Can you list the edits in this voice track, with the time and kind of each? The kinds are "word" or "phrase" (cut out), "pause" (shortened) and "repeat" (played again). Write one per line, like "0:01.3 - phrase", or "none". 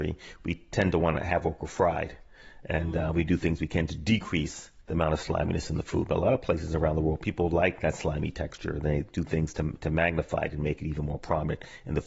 0:04.8 - pause